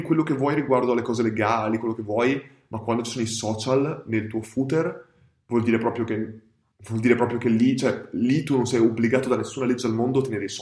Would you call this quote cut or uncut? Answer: uncut